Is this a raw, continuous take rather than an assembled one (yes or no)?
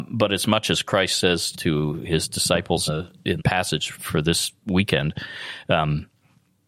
no